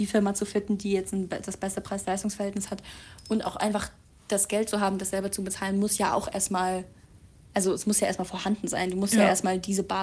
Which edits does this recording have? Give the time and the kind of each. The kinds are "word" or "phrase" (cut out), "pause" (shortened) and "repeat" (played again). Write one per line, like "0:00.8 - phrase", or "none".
none